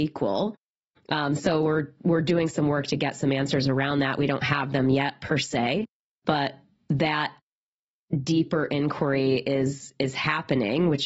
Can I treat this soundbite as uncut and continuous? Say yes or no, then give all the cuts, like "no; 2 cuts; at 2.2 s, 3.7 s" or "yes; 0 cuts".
yes; 0 cuts